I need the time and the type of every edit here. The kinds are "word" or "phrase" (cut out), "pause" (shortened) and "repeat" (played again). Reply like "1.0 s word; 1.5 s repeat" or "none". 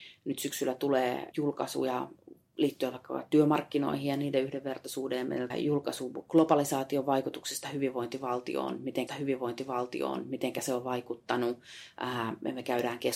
1.3 s word; 5.5 s word; 9.1 s repeat